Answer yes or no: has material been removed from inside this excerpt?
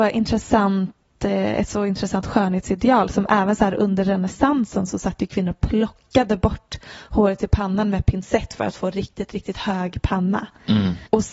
no